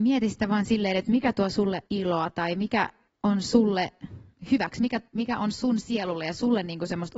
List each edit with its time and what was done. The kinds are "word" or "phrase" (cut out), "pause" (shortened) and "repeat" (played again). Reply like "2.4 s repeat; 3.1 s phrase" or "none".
1.9 s pause; 3.1 s pause; 5.1 s pause